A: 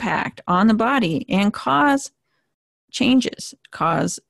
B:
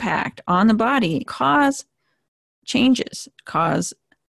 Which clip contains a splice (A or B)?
B